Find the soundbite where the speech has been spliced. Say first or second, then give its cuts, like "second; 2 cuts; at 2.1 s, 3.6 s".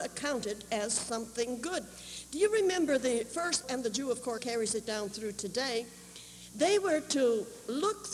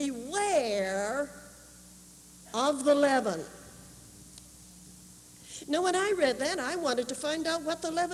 first; 2 cuts; at 3.6 s, 4.4 s